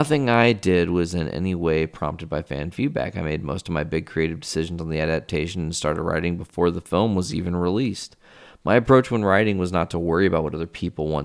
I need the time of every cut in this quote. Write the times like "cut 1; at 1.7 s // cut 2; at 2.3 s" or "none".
none